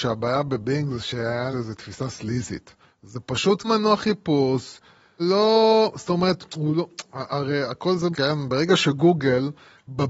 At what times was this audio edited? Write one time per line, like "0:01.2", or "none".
0:01.5
0:02.8
0:03.6
0:05.2
0:08.1